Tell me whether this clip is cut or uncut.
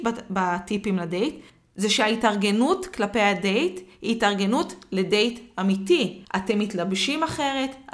cut